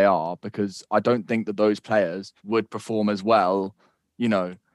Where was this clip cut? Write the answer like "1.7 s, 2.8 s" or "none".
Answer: 2.4 s